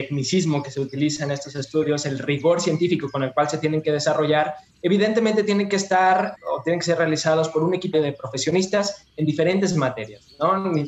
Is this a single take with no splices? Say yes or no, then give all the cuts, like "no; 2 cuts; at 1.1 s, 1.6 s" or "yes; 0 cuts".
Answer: no; 2 cuts; at 6.4 s, 7.9 s